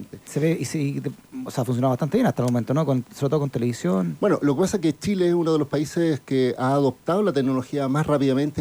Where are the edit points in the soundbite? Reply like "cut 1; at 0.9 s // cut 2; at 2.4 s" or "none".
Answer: none